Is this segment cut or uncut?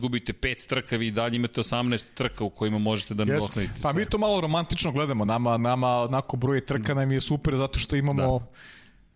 uncut